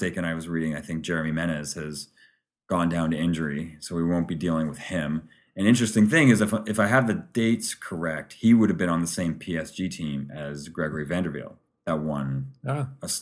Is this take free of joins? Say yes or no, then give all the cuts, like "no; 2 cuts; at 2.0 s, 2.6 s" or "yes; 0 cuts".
yes; 0 cuts